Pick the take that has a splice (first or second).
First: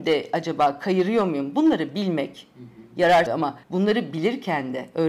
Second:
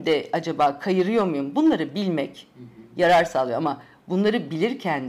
first